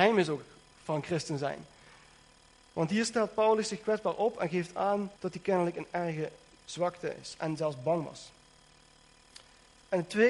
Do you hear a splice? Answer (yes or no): yes